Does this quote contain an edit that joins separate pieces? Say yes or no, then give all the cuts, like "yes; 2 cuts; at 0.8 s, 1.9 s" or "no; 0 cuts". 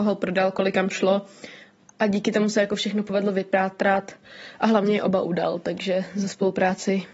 no; 0 cuts